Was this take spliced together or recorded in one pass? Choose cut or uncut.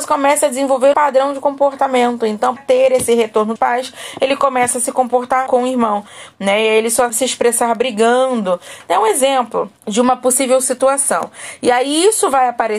cut